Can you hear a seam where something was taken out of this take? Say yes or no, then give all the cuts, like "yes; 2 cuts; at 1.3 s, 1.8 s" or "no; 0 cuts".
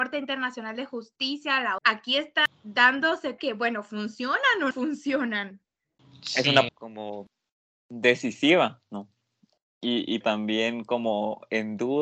yes; 5 cuts; at 1.8 s, 3.4 s, 4.7 s, 6.7 s, 10.2 s